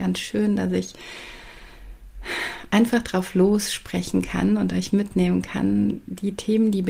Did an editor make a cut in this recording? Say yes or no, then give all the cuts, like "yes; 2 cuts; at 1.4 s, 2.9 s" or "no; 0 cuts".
no; 0 cuts